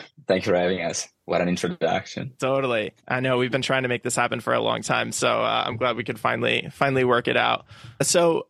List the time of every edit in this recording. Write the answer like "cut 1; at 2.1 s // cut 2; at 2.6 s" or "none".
cut 1; at 3.0 s